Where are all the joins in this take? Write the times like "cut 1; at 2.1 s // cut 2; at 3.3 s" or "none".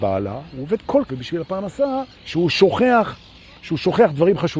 cut 1; at 1.1 s // cut 2; at 2.1 s